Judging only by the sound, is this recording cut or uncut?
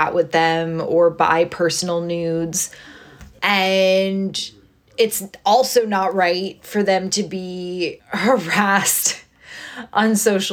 uncut